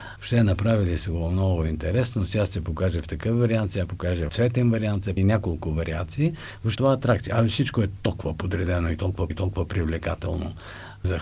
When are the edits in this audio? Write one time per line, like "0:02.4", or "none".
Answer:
0:04.3
0:05.2
0:06.7
0:09.3